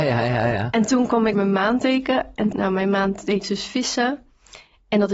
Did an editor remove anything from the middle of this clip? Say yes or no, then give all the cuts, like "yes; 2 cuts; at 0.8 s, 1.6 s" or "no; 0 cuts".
yes; 3 cuts; at 1.3 s, 2.5 s, 3.4 s